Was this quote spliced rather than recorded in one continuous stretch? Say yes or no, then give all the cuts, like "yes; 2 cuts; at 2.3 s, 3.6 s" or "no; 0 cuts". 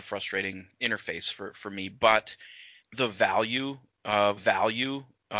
yes; 1 cut; at 4.4 s